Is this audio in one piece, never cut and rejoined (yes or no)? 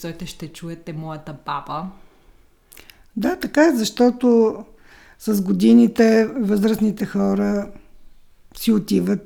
yes